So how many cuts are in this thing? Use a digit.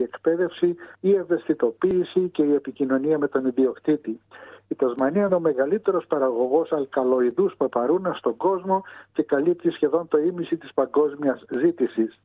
2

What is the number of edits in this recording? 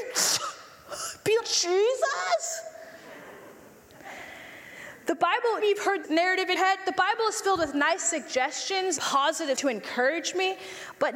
6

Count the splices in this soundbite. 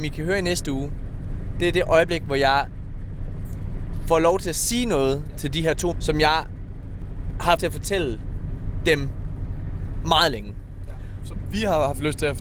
2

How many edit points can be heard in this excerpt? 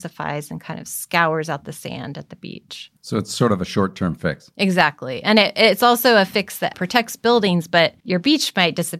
2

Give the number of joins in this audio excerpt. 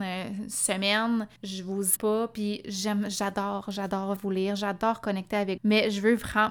4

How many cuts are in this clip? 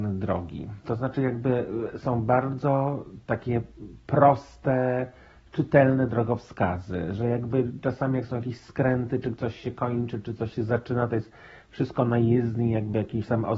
0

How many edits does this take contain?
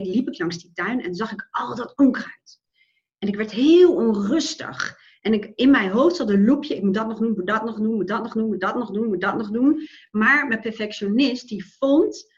0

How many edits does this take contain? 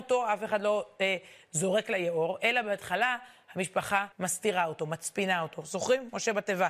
1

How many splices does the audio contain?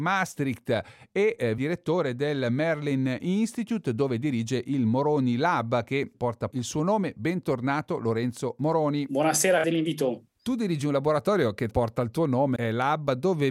6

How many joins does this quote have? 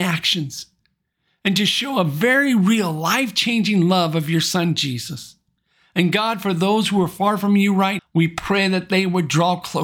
1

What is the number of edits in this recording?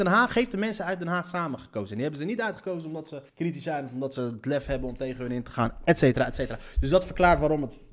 1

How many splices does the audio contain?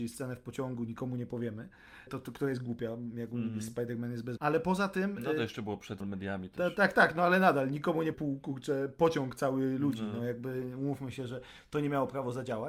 5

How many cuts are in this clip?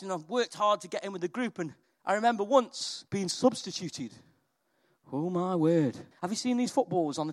3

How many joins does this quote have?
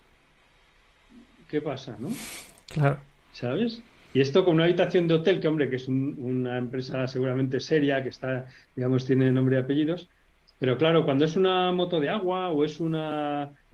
0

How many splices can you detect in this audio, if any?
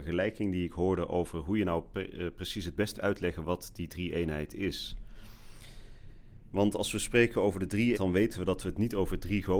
2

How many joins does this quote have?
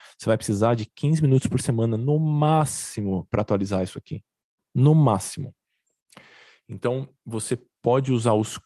0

